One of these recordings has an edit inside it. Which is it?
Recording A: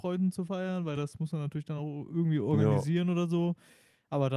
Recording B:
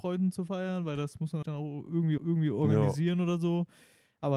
B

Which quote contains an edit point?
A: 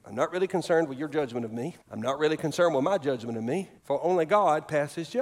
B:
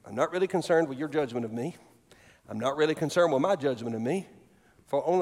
A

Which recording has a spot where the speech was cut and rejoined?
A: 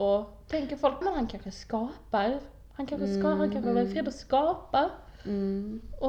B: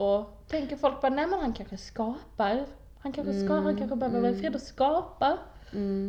A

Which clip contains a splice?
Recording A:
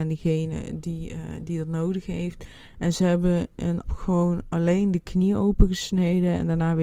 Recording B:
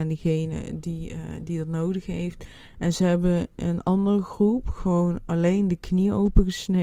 A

